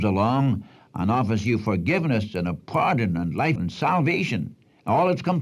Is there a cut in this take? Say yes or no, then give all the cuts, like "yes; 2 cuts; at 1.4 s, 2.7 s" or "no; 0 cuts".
yes; 1 cut; at 3.6 s